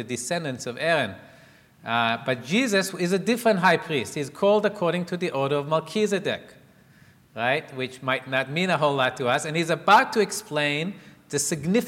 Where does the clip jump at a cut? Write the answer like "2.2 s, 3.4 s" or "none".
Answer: none